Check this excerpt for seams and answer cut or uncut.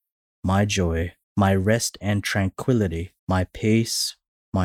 cut